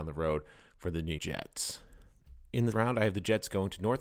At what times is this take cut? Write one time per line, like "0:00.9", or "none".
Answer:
0:01.2
0:02.7